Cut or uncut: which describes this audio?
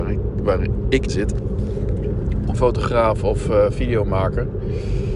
cut